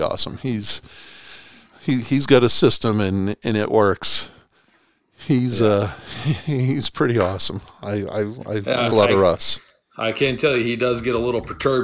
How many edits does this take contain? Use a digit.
1